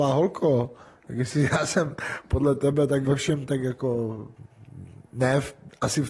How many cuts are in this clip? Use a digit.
1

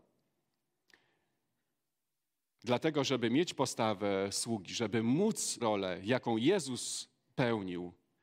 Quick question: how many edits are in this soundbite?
1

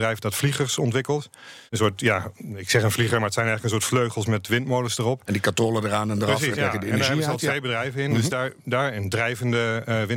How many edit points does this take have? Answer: 2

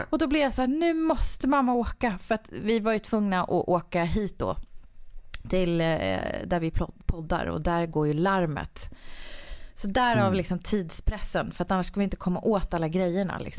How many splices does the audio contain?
0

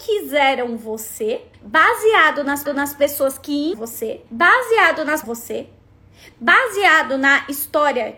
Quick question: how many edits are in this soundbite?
5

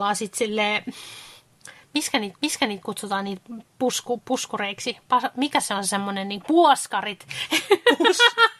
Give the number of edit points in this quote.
1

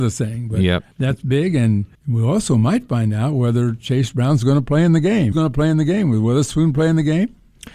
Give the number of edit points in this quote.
3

